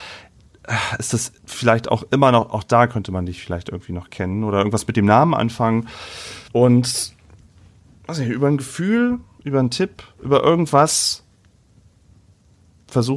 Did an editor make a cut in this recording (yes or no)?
yes